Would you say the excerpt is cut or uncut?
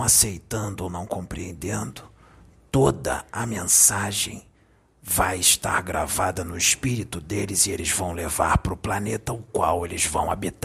uncut